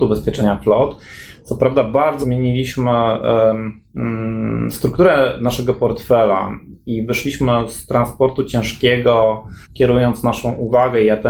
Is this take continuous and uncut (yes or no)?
no